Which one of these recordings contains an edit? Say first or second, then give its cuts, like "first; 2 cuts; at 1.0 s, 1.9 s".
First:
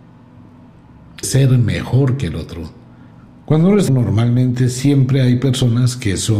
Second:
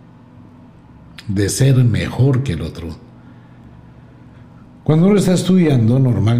first; 3 cuts; at 1.2 s, 3.1 s, 3.9 s